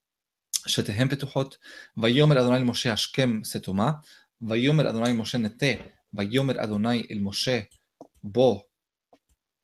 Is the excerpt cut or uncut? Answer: uncut